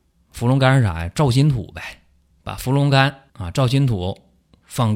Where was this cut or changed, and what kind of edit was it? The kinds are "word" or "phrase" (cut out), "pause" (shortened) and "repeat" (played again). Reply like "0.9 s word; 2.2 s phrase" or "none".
2.3 s pause; 3.3 s pause

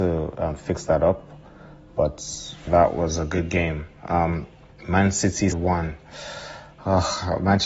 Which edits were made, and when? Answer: 2.7 s word; 4.7 s pause; 5.5 s phrase

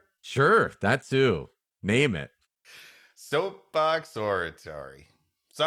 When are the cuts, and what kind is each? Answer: none

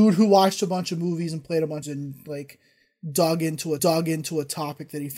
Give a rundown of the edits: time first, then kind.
1.8 s phrase; 3.8 s repeat

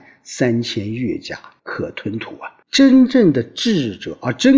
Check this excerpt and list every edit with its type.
1.6 s pause; 2.6 s pause

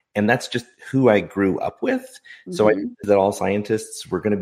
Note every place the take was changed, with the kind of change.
3.0 s word

